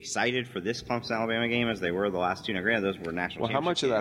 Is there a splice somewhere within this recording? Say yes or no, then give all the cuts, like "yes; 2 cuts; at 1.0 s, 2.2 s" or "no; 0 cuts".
no; 0 cuts